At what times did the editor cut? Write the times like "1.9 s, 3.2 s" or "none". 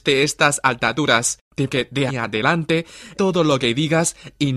1.7 s, 2.1 s, 3.1 s